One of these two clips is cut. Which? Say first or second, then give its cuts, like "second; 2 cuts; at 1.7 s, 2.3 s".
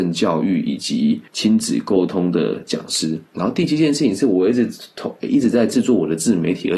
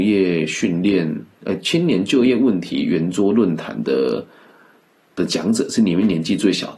first; 1 cut; at 1.3 s